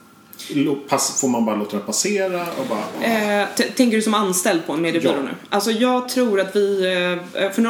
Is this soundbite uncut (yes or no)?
yes